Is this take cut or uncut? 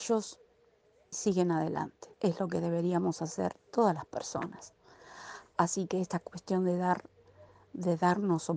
cut